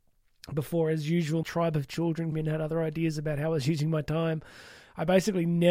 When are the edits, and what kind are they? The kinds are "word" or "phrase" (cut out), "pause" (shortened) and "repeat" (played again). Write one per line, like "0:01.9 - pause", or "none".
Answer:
0:01.4 - word
0:02.3 - word